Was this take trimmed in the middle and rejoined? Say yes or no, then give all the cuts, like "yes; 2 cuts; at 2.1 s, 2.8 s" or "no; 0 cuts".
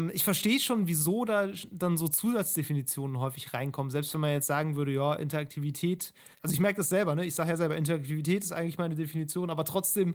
yes; 1 cut; at 6.3 s